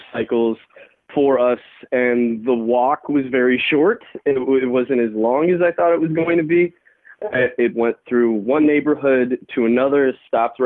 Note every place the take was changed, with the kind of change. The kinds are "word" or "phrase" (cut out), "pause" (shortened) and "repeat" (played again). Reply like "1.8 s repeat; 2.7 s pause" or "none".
none